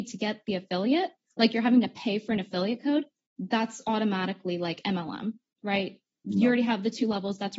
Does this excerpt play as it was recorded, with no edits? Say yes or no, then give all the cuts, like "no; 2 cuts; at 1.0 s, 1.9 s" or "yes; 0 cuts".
yes; 0 cuts